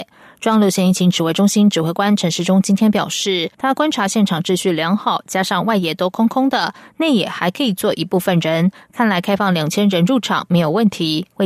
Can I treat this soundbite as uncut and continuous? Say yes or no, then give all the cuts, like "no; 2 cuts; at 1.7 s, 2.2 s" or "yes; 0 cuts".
no; 1 cut; at 3.5 s